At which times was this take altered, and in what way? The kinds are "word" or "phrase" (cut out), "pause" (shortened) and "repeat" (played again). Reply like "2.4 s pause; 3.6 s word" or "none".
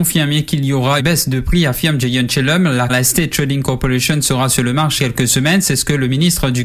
1.0 s word; 2.9 s phrase; 5.0 s word